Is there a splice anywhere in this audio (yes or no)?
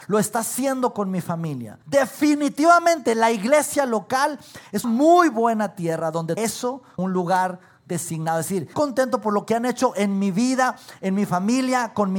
yes